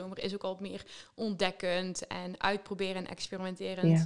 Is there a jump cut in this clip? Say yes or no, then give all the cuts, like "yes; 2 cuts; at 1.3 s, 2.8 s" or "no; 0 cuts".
no; 0 cuts